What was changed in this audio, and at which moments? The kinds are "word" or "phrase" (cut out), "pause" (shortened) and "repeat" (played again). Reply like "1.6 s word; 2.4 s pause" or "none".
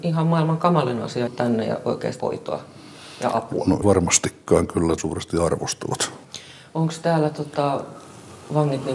1.3 s word; 2.2 s word; 3.8 s word; 5.0 s phrase

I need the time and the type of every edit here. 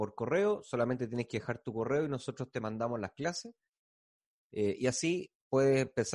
none

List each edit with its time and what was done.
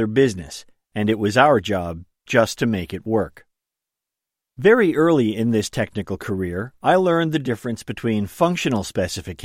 none

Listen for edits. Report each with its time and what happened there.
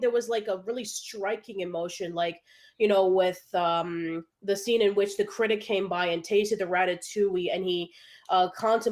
4.3 s pause

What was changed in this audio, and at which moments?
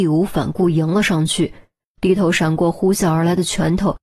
none

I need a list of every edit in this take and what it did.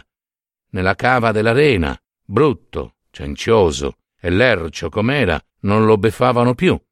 2.0 s pause; 4.1 s pause; 5.5 s pause

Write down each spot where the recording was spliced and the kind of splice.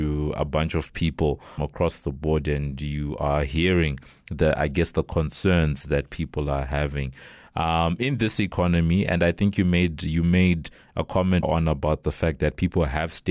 1.6 s word; 11.4 s word

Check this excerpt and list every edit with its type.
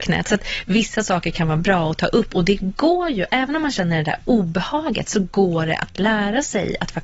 none

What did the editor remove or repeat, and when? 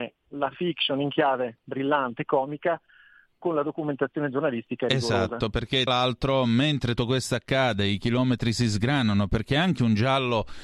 5.9 s word; 7.0 s word

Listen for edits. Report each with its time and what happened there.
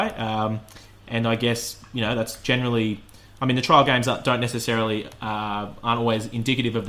none

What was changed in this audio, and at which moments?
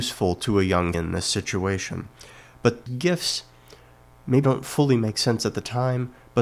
0.9 s word; 2.9 s word; 4.4 s word

